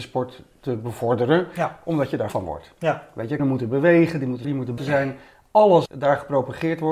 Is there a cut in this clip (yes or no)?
yes